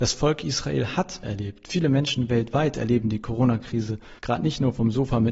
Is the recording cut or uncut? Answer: cut